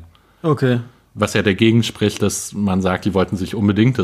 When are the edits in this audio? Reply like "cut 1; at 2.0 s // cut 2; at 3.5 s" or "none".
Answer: none